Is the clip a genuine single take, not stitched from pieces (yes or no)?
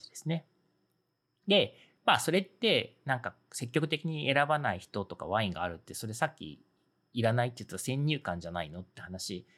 yes